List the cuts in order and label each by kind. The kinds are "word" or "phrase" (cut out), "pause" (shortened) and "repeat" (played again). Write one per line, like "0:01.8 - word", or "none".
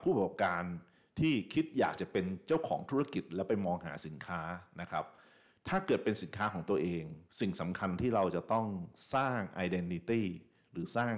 0:07.3 - pause